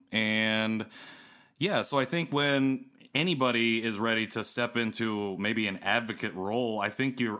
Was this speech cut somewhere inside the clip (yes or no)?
no